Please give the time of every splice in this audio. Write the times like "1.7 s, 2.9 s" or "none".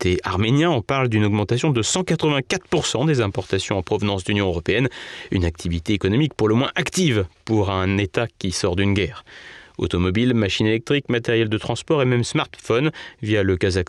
none